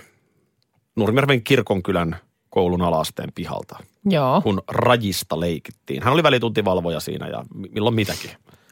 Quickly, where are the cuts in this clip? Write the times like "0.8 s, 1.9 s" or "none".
none